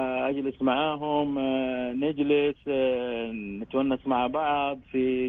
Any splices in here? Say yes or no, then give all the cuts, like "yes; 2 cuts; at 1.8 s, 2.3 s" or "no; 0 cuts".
no; 0 cuts